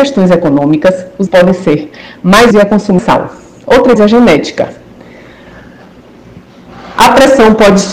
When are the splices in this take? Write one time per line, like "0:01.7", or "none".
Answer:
0:01.3
0:02.5
0:03.0
0:04.0